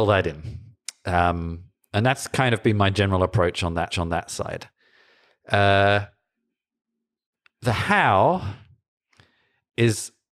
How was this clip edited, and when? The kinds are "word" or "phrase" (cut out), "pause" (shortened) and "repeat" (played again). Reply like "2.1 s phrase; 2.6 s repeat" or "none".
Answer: 3.9 s repeat